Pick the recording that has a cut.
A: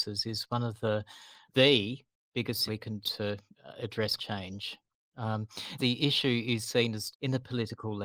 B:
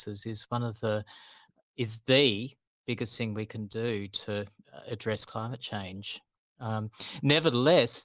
A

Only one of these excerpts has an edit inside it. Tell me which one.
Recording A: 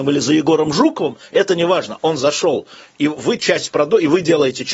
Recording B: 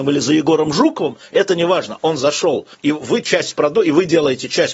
B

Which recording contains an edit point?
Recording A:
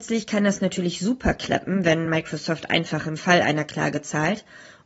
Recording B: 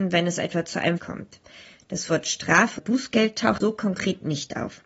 B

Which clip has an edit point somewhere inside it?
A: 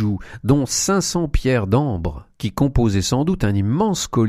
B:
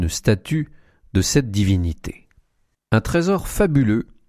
A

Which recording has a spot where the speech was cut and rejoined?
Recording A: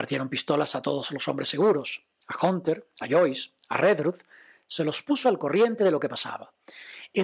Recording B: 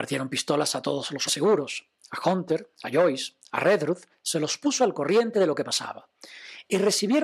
B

